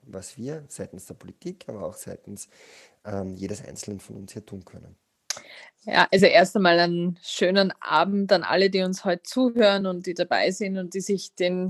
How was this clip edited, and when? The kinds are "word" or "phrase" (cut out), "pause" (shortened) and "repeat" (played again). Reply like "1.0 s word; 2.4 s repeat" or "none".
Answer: none